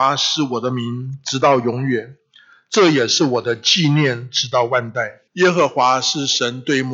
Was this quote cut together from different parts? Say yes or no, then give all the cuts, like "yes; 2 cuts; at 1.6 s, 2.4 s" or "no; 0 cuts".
yes; 1 cut; at 5.3 s